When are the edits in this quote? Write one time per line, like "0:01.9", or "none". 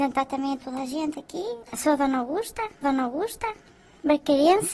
0:01.6
0:02.8